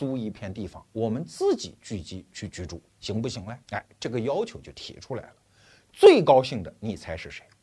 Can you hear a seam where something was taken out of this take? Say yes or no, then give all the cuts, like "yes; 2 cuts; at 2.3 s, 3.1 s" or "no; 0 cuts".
yes; 1 cut; at 3.6 s